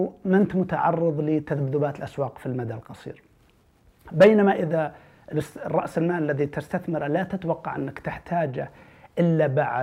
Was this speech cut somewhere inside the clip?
no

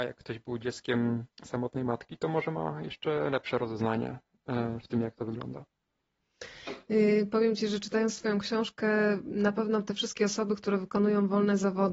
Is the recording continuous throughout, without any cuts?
no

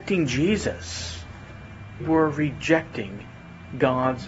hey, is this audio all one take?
no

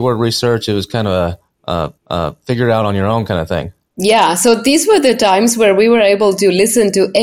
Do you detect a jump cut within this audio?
yes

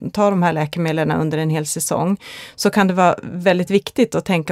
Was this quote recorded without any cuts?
yes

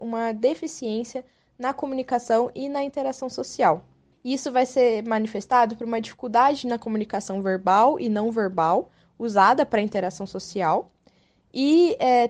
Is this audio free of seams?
no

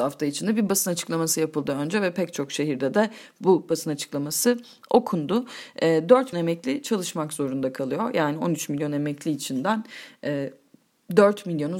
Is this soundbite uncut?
no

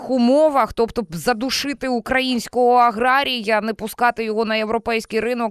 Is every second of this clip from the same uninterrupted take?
yes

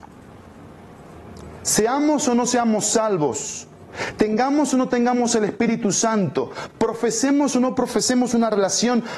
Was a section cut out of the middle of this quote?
no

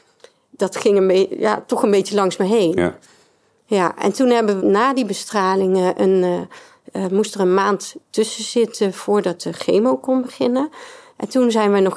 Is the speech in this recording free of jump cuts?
no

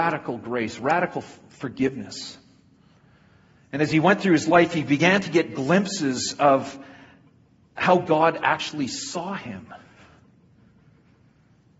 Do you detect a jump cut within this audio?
no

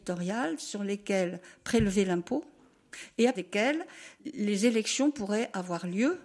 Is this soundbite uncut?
no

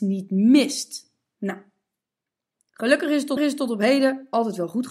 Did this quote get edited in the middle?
yes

